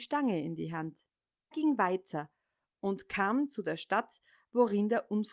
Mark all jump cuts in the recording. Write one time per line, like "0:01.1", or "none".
0:01.5